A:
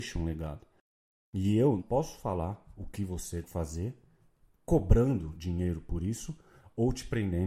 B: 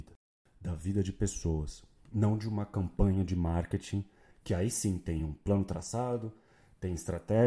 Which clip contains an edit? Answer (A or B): A